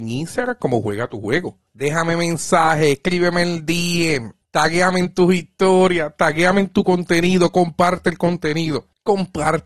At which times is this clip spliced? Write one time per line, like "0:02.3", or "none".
none